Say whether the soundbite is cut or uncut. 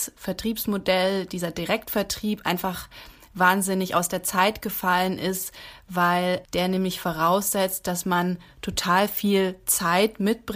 uncut